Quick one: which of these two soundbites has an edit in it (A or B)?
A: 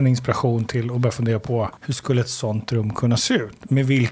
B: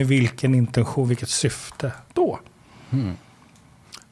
A